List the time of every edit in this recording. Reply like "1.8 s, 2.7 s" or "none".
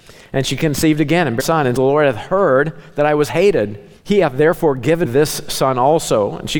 1.4 s, 1.8 s, 4.0 s, 5.0 s